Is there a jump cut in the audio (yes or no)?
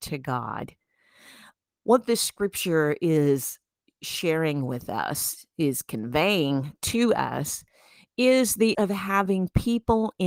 yes